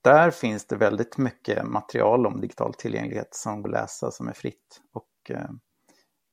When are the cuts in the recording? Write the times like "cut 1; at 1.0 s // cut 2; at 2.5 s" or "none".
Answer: cut 1; at 3.6 s